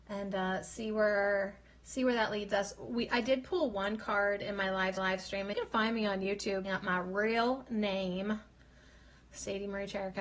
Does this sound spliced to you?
yes; 3 cuts; at 5.0 s, 5.5 s, 6.6 s

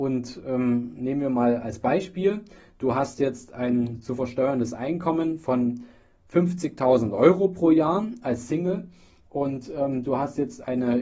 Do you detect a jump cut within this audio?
no; 0 cuts

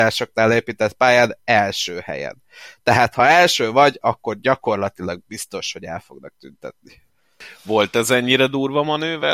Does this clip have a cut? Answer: no; 0 cuts

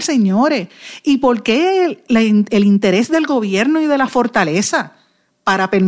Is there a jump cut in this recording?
no; 0 cuts

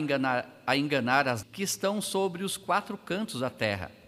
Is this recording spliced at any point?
yes; 1 cut; at 1.4 s

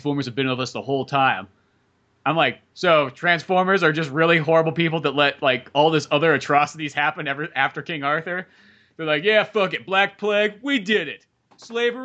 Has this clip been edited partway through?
no; 0 cuts

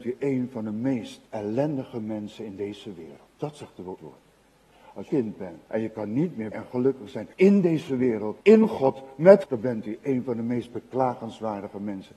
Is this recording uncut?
no; 9 cuts; at 1.3 s, 3.3 s, 4.0 s, 5.1 s, 5.7 s, 6.5 s, 7.3 s, 8.4 s, 9.4 s

